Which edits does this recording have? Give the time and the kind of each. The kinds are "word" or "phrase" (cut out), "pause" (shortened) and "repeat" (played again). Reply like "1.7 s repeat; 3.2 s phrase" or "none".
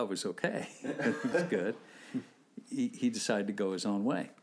1.3 s word